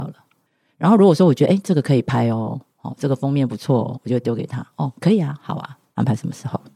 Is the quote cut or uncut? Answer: uncut